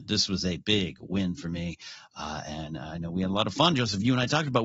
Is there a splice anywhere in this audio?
no; 0 cuts

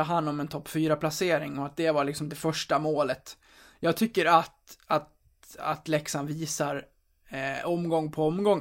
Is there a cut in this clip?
no; 0 cuts

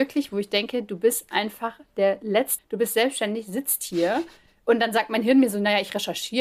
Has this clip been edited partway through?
yes; 1 cut; at 2.6 s

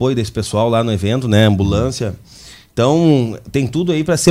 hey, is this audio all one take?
yes; 0 cuts

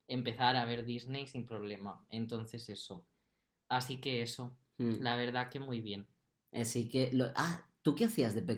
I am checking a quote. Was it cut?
no; 0 cuts

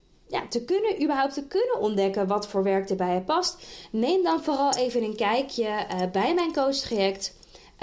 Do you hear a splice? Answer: no; 0 cuts

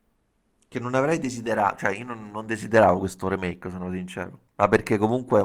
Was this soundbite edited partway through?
yes; 1 cut; at 4.5 s

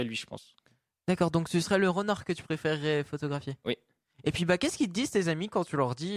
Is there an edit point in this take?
no; 0 cuts

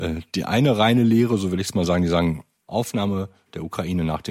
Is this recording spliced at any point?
no; 0 cuts

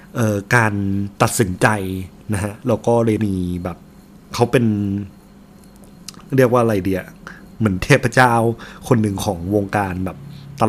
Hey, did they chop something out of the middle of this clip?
yes; 3 cuts; at 1.1 s, 3.2 s, 6.3 s

